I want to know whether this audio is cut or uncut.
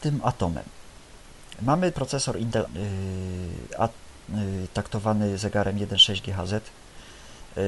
cut